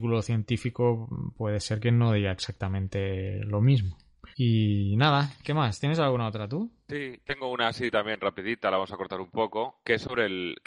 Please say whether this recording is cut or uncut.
cut